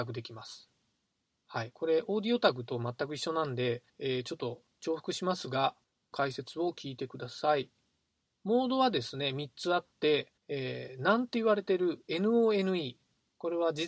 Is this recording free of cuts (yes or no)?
no